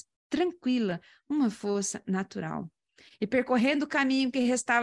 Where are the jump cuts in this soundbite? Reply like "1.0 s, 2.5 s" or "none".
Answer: none